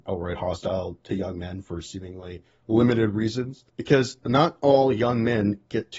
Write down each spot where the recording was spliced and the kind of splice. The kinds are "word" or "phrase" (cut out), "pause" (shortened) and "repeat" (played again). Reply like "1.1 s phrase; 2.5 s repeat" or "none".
3.7 s pause